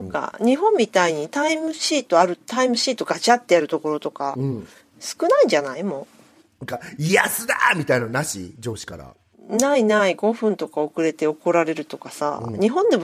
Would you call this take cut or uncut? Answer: uncut